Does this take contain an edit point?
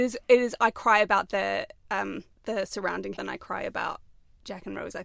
yes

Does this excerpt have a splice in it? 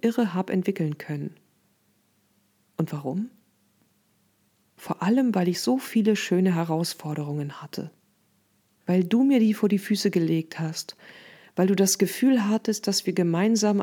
no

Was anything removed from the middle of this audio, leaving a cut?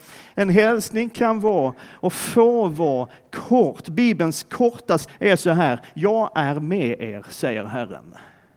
yes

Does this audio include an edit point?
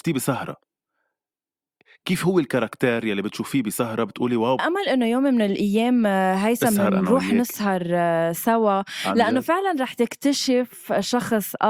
yes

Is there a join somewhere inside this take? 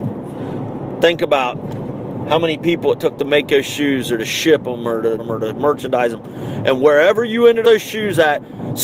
yes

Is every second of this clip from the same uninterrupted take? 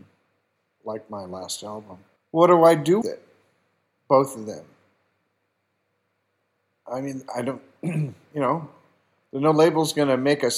no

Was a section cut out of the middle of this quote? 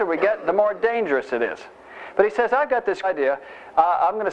yes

